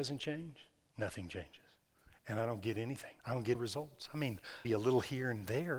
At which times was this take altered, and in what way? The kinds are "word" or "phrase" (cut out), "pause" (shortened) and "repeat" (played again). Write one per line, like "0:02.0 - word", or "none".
0:03.2 - pause
0:03.5 - word
0:04.6 - word